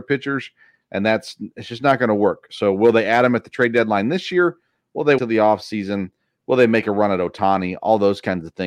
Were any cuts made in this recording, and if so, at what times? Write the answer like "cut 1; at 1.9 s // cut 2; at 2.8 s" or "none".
cut 1; at 5.2 s